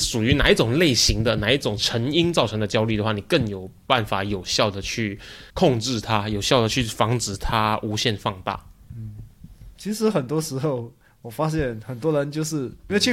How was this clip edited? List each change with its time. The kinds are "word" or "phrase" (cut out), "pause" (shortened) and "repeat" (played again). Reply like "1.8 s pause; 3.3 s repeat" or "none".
5.5 s pause